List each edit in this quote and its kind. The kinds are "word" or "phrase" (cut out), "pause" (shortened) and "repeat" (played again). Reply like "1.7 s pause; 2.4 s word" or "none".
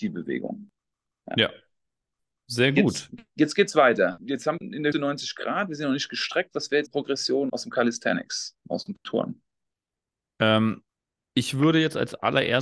3.3 s word; 4.6 s word; 4.9 s word; 6.9 s word; 7.5 s word